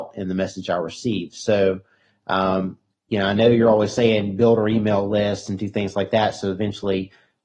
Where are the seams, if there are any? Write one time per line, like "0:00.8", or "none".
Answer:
0:02.9